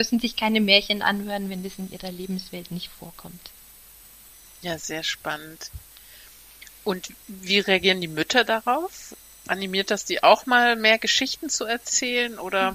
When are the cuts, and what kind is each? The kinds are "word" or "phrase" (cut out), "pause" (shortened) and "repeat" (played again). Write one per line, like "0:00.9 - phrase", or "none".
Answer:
none